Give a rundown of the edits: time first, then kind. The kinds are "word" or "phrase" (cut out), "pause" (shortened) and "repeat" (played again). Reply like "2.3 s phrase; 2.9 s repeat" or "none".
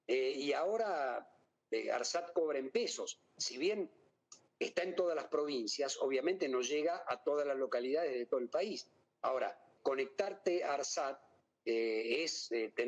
9.8 s word